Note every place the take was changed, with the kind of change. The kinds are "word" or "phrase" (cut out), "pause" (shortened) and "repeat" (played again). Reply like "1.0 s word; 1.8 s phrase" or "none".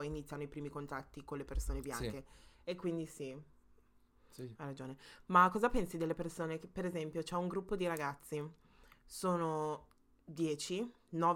none